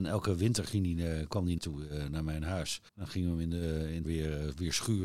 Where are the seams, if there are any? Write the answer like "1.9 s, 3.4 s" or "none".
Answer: 1.6 s, 2.9 s, 4.0 s